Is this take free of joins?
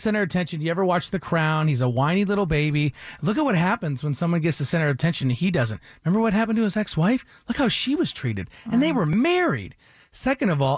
yes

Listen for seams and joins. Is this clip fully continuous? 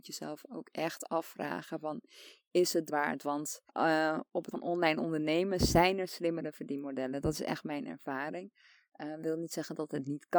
no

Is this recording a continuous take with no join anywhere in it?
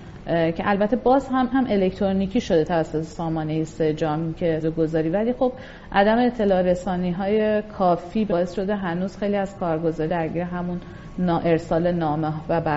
no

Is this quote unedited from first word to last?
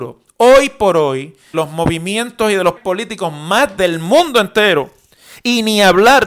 no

